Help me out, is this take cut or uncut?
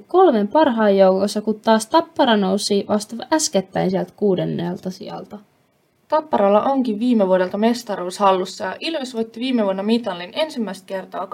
uncut